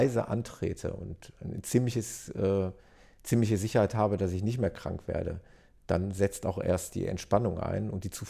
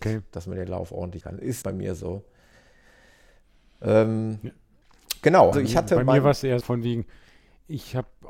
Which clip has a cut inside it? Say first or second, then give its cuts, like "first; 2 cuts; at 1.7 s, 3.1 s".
second; 4 cuts; at 1.2 s, 1.6 s, 5.5 s, 6.6 s